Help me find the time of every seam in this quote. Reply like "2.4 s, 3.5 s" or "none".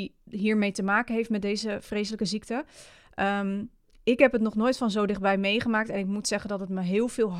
none